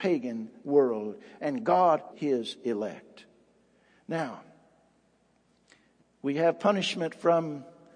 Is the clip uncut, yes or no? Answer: no